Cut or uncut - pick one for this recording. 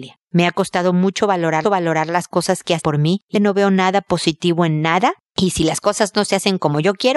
cut